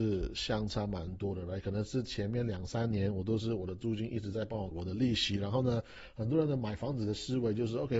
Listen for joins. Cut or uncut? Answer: cut